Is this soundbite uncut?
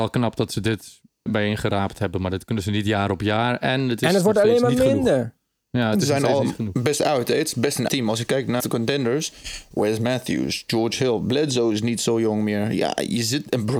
no; 3 cuts; at 1.3 s, 7.9 s, 8.6 s

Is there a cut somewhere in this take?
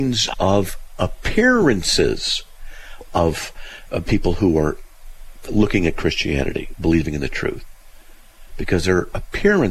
no; 0 cuts

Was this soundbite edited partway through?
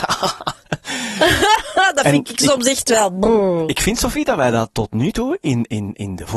no; 0 cuts

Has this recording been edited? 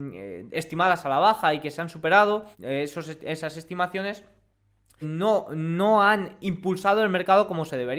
yes; 2 cuts; at 2.5 s, 5.0 s

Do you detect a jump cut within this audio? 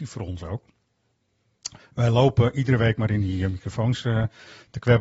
no; 0 cuts

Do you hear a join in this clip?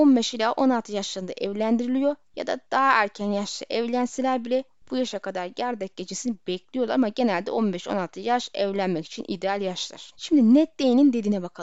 yes; 1 cut; at 10.1 s

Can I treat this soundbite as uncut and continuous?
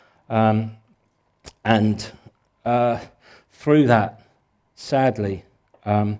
yes; 0 cuts

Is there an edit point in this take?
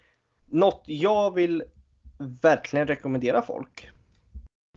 no; 0 cuts

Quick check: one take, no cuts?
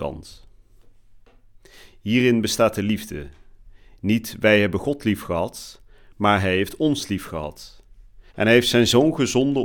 no; 1 cut; at 8.3 s

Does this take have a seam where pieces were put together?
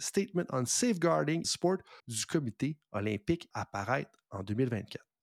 yes; 3 cuts; at 1.4 s, 2.0 s, 3.5 s

